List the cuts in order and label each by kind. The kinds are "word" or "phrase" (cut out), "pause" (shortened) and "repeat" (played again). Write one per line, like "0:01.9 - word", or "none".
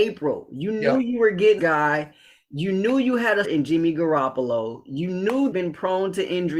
0:01.6 - word
0:03.4 - word
0:05.5 - phrase

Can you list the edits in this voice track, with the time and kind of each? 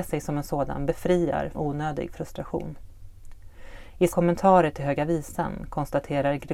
0:01.5 - word
0:04.1 - word

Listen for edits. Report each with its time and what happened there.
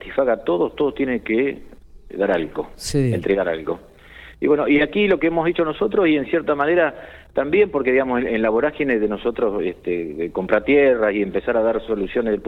none

